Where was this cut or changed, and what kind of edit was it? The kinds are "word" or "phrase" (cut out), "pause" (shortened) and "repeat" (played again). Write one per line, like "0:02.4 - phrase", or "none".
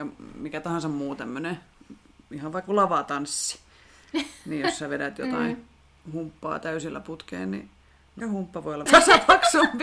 0:02.7 - word
0:08.2 - word
0:08.9 - word